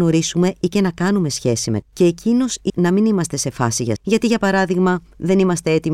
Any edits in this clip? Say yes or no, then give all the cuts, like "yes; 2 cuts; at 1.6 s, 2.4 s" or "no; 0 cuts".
yes; 3 cuts; at 1.8 s, 2.7 s, 4.0 s